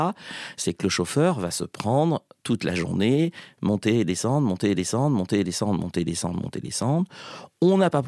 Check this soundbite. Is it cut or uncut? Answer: cut